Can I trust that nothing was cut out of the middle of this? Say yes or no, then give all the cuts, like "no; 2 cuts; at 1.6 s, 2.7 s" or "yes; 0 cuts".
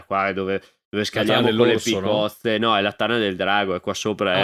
yes; 0 cuts